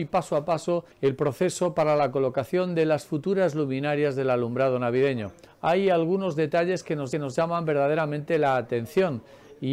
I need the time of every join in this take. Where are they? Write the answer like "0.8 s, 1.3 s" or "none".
0.9 s, 5.5 s, 7.1 s